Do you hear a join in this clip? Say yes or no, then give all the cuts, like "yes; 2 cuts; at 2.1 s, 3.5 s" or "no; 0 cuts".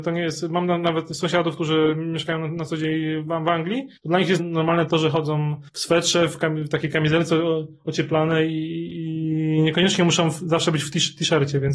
yes; 3 cuts; at 4.0 s, 4.4 s, 5.7 s